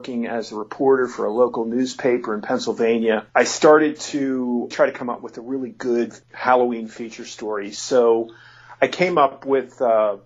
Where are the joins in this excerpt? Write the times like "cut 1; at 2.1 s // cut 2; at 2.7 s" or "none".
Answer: cut 1; at 3.3 s // cut 2; at 4.7 s // cut 3; at 6.2 s